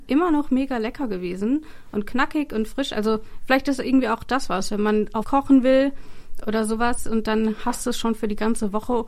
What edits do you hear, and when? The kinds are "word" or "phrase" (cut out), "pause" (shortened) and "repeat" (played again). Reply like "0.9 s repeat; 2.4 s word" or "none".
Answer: 5.2 s word